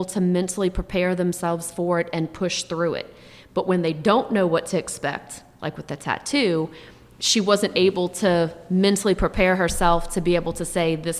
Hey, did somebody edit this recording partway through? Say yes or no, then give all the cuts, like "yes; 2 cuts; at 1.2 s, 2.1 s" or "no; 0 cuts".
no; 0 cuts